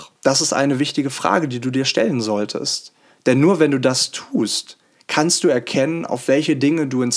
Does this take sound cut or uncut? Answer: uncut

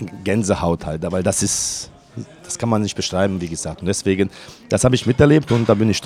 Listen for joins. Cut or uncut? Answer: uncut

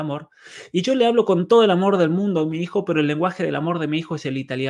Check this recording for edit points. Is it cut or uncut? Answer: uncut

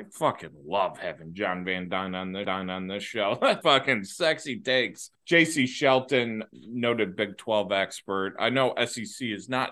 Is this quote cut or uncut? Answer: cut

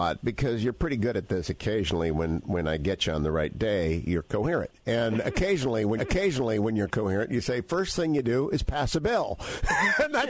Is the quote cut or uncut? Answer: cut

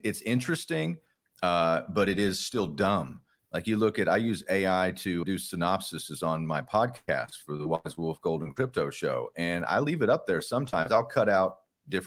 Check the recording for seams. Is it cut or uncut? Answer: cut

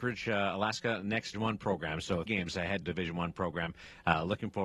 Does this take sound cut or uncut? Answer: cut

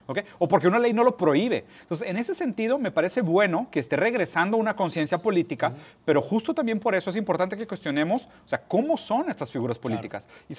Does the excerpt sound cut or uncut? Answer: uncut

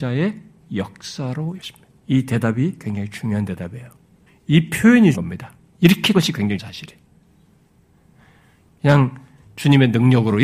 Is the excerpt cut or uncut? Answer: cut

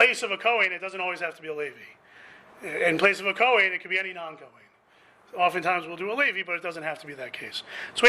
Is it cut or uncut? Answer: uncut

